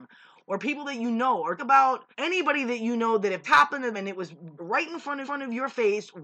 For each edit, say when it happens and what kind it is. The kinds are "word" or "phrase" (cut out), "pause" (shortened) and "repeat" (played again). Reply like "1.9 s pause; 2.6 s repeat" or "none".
1.6 s word; 2.1 s pause; 3.4 s word; 3.9 s word; 4.6 s word; 5.2 s repeat